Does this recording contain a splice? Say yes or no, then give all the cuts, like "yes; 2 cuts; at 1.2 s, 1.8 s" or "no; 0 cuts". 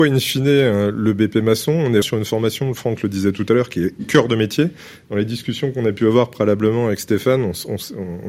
yes; 1 cut; at 2.0 s